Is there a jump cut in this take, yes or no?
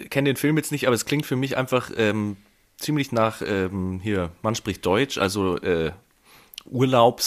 no